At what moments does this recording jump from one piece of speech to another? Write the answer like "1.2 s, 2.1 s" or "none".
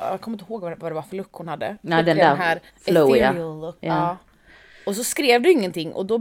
2.7 s, 3.8 s